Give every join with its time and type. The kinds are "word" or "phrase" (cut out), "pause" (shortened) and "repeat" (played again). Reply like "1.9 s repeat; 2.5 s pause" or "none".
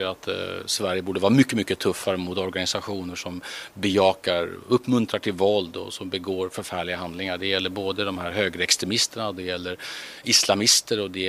none